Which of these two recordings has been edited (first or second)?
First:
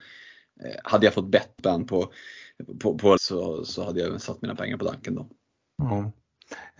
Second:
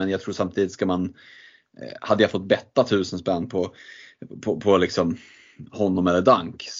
first